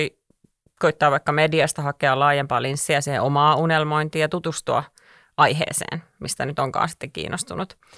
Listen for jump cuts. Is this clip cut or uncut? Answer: uncut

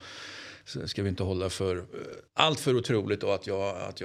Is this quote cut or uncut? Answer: cut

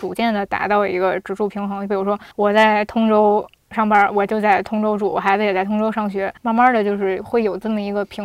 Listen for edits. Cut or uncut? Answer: cut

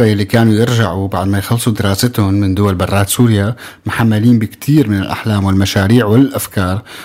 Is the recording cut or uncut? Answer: uncut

